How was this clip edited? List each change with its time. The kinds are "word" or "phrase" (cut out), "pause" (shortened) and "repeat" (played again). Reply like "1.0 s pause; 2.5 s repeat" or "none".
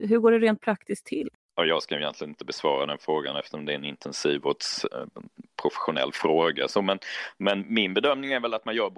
1.3 s pause

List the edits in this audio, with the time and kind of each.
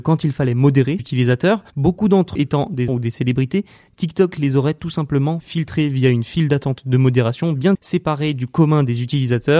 1.0 s word; 1.7 s pause; 2.4 s word; 2.9 s word; 5.4 s word; 7.7 s word

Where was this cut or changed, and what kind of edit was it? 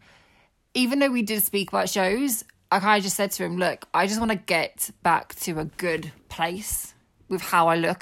6.2 s pause

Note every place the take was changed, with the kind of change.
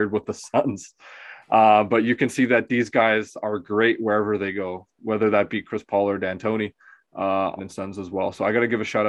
7.6 s phrase

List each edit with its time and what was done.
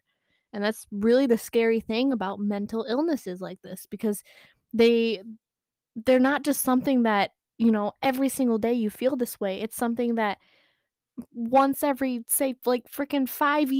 none

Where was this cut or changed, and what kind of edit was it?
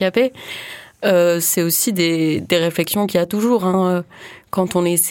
none

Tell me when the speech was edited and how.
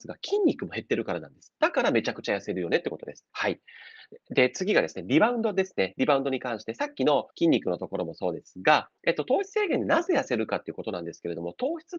3.3 s pause; 7.3 s pause; 9.0 s pause

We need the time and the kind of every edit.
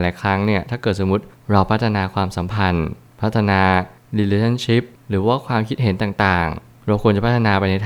none

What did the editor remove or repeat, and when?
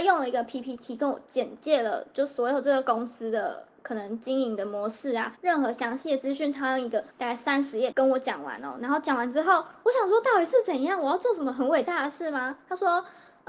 5.4 s pause; 7.1 s pause; 7.9 s word

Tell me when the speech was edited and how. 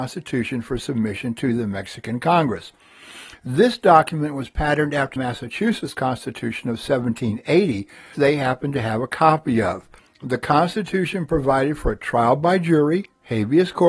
5.2 s word; 8.1 s word; 10.0 s pause

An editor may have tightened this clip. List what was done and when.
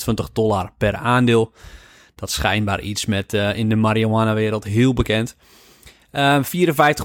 none

